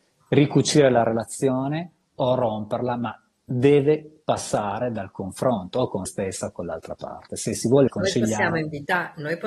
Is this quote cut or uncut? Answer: cut